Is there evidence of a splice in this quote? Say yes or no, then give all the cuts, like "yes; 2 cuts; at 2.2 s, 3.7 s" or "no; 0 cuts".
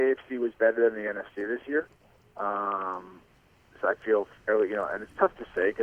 no; 0 cuts